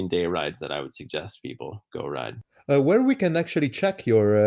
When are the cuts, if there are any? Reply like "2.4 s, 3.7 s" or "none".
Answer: none